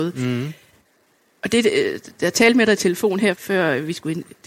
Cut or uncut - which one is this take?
uncut